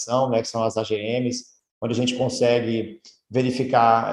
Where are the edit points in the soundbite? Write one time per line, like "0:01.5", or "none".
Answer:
none